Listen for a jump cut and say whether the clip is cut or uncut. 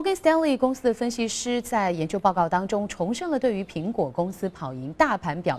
uncut